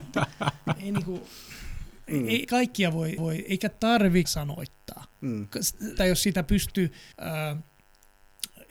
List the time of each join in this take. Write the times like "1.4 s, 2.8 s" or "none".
2.4 s, 3.2 s, 4.2 s, 5.1 s, 6.0 s, 7.1 s